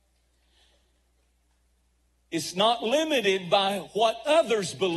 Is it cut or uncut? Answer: uncut